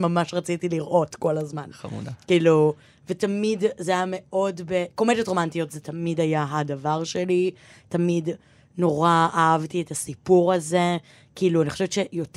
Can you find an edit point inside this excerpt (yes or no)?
no